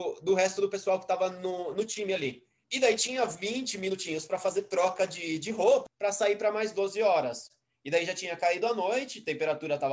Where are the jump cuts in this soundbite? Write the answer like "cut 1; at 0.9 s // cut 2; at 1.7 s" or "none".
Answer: none